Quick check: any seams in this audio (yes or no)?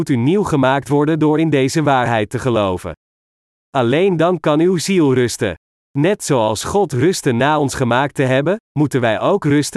no